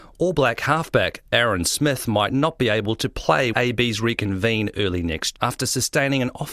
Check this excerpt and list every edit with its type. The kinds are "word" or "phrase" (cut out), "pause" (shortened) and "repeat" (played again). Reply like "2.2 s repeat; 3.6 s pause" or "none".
3.5 s phrase; 5.4 s word